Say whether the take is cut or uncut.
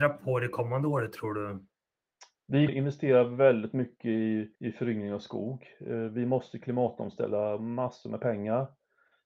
cut